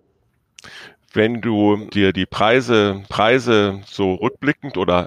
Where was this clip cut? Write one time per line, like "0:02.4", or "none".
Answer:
0:01.9
0:03.1

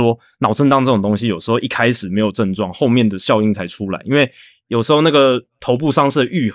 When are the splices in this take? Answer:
0:05.5

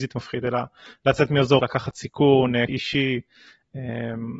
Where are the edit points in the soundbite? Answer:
0:01.6
0:02.7

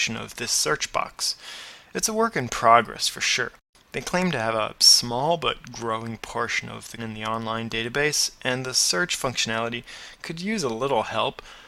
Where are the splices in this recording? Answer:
0:07.0

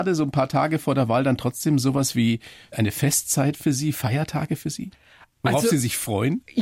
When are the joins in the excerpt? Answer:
none

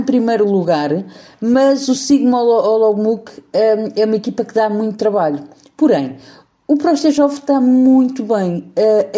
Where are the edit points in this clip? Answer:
none

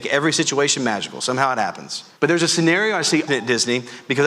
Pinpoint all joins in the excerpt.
0:02.2
0:03.3

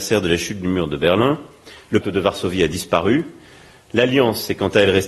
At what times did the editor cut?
0:02.0

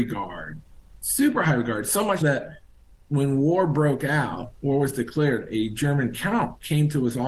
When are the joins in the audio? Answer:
0:02.2

